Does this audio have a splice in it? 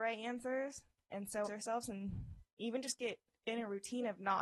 yes; 1 cut; at 1.4 s

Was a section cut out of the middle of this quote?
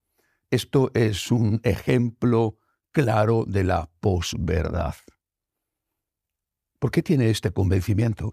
no; 0 cuts

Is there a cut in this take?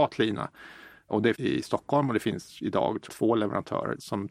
yes; 2 cuts; at 1.3 s, 3.1 s

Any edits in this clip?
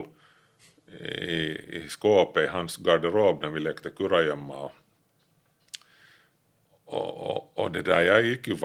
no; 0 cuts

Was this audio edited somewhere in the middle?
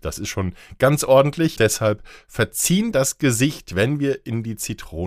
yes; 2 cuts; at 1.6 s, 2.9 s

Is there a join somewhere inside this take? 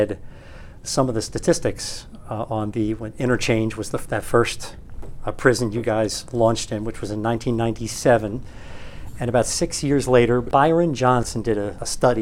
no; 0 cuts

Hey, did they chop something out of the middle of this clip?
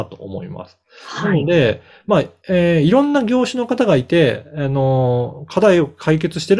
no; 0 cuts

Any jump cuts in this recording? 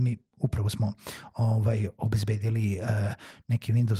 no; 0 cuts

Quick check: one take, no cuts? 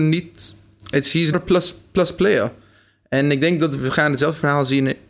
no; 2 cuts; at 1.3 s, 3.8 s

